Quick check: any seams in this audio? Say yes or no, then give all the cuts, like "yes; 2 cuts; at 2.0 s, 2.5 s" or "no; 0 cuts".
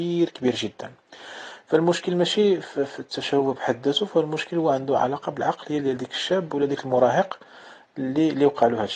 no; 0 cuts